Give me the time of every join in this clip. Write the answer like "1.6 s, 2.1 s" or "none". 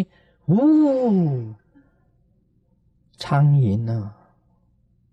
none